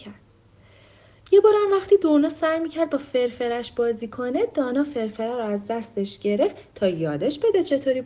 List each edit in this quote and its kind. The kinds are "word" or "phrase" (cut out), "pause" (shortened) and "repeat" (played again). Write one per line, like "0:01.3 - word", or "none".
none